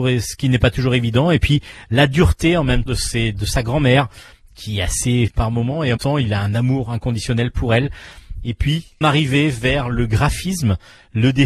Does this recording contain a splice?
yes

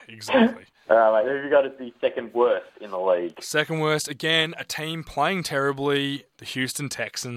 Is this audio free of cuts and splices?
no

